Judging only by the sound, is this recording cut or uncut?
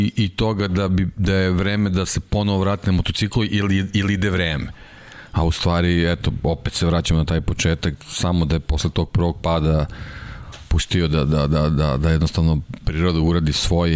uncut